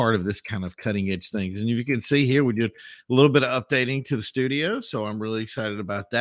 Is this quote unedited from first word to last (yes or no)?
yes